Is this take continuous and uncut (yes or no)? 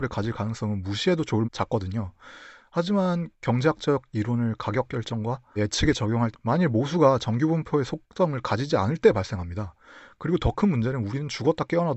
no